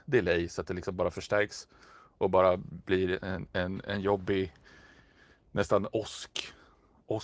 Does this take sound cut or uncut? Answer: uncut